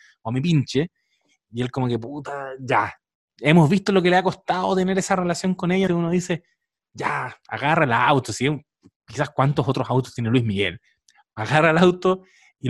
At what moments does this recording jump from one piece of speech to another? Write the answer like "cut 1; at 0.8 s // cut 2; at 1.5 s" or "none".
cut 1; at 5.9 s